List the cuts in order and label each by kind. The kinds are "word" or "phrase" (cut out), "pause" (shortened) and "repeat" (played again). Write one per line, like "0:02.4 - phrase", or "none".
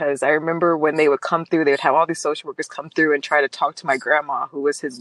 none